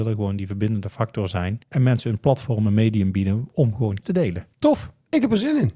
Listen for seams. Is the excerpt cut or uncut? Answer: cut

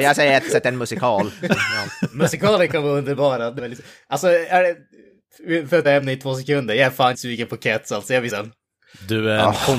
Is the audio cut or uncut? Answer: cut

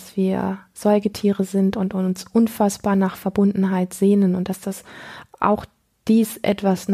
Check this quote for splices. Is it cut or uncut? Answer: uncut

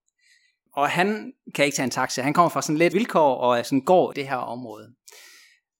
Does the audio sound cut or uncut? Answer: cut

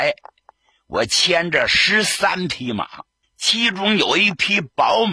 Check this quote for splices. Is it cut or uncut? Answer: cut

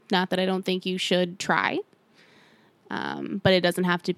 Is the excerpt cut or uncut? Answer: uncut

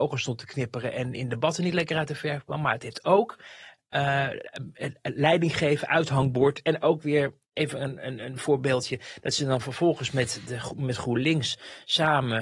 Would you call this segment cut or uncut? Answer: cut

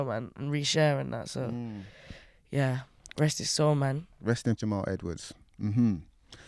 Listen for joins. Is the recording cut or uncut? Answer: cut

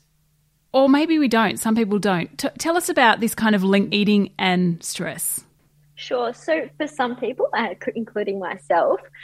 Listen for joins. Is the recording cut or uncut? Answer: cut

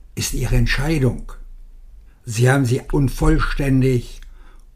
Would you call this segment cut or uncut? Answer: cut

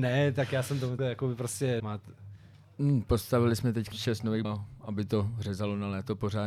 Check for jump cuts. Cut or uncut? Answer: cut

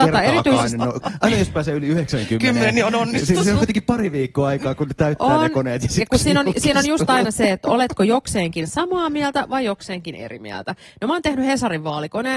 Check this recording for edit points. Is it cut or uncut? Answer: uncut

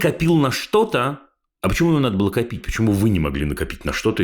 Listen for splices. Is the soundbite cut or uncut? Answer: uncut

